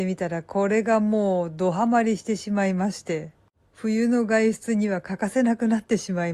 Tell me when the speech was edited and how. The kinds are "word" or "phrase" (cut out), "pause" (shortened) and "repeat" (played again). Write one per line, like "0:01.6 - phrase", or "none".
none